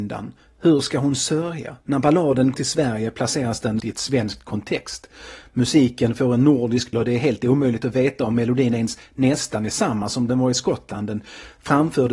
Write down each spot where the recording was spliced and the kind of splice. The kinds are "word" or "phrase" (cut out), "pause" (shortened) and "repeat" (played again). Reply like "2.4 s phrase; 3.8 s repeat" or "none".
1.8 s pause; 2.5 s word; 3.8 s word; 6.9 s word